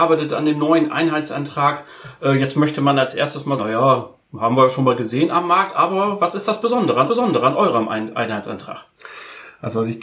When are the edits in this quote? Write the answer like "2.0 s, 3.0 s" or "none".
3.6 s, 4.2 s, 7.1 s